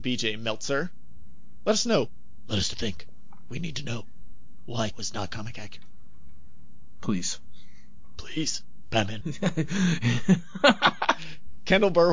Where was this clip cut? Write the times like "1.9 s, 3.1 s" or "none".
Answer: 2.7 s, 4.9 s, 9.2 s

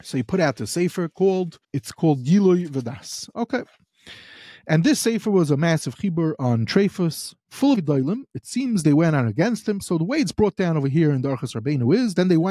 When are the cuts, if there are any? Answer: 1.6 s, 7.7 s

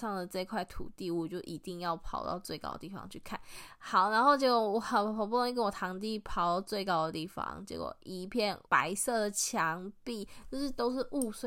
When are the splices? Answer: 8.7 s

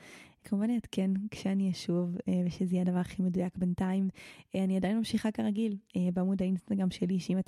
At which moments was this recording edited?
none

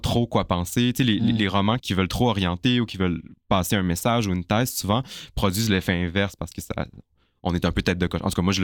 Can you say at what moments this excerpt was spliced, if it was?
1.8 s

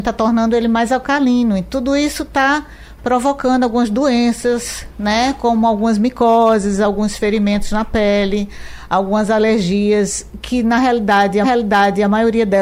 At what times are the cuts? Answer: 11.4 s

